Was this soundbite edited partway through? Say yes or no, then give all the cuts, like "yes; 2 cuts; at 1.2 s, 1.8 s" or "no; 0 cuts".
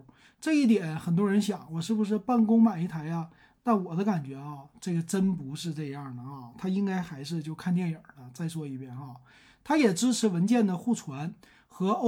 no; 0 cuts